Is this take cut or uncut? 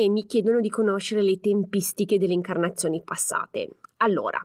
uncut